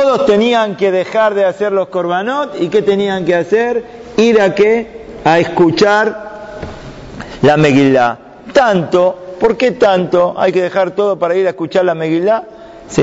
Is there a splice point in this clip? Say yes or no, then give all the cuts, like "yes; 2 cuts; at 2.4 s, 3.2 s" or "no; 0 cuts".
no; 0 cuts